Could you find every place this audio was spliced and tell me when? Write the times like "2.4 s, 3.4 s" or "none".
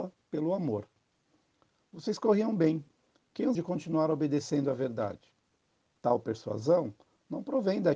3.6 s